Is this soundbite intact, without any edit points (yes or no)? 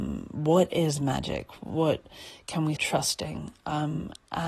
no